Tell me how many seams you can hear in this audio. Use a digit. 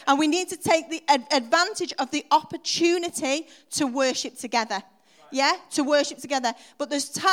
0